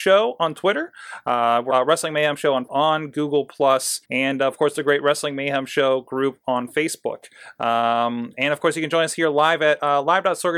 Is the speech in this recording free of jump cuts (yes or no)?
no